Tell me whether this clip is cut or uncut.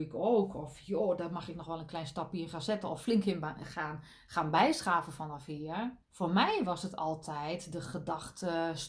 cut